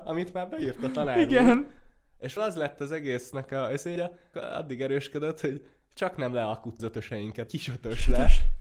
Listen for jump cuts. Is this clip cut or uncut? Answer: cut